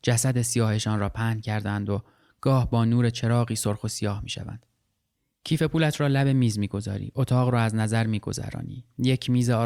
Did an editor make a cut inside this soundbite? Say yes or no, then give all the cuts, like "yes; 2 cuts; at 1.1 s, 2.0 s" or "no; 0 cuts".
no; 0 cuts